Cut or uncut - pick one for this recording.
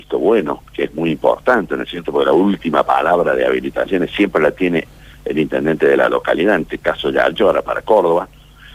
uncut